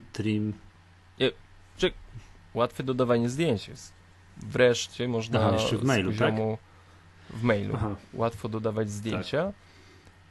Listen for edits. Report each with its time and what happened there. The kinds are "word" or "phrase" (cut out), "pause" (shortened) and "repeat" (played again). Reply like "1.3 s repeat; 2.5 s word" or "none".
none